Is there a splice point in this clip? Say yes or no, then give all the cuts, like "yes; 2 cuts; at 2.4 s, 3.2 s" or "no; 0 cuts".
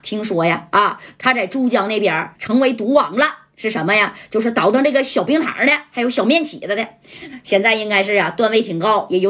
yes; 1 cut; at 2.3 s